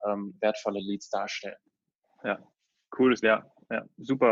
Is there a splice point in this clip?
yes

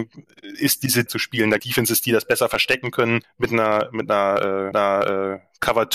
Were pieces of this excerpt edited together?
yes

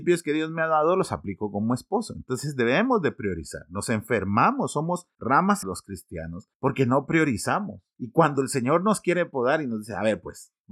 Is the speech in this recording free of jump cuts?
no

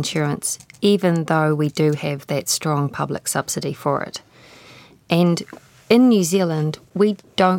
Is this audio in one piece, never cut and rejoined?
yes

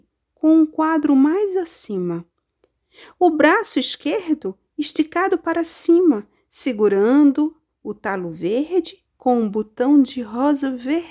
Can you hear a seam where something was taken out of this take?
no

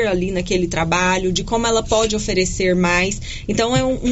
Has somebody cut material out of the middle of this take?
no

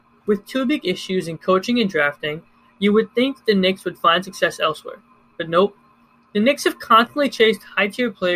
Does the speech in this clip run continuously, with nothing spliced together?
yes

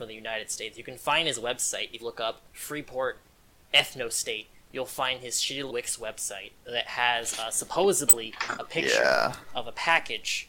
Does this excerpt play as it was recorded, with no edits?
no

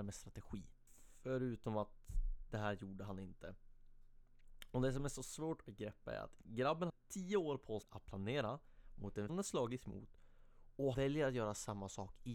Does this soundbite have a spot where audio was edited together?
yes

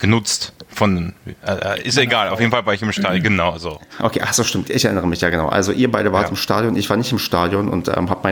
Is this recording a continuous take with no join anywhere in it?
yes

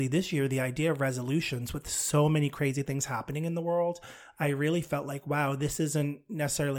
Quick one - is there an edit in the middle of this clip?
no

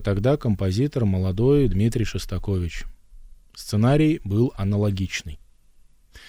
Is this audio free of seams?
yes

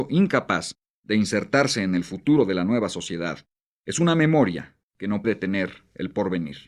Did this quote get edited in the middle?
yes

